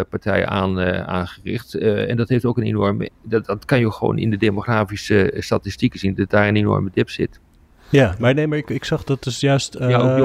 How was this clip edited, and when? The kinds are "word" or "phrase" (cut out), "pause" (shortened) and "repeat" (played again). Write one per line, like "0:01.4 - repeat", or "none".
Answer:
none